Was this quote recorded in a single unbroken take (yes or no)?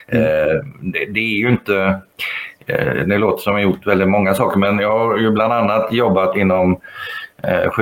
yes